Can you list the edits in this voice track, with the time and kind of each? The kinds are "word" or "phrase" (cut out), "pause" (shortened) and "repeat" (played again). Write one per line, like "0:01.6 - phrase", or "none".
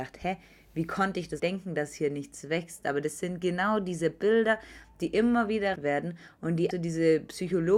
0:01.4 - word
0:05.8 - word
0:06.7 - word